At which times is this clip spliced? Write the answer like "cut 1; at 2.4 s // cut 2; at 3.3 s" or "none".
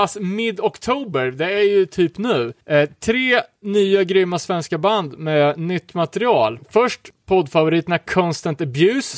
cut 1; at 2.6 s